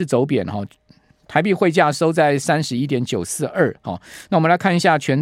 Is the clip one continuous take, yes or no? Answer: yes